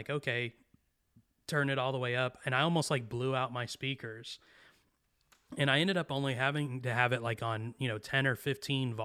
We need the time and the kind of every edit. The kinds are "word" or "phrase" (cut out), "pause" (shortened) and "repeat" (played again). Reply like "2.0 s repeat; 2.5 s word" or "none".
none